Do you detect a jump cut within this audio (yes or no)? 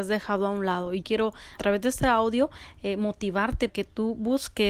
yes